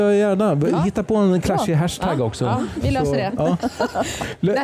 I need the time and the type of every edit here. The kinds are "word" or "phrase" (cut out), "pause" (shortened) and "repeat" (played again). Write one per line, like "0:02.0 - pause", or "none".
none